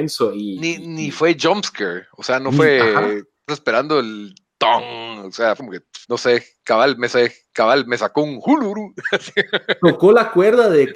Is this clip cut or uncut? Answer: cut